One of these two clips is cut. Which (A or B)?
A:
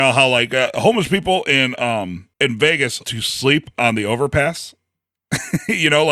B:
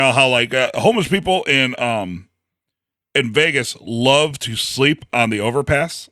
A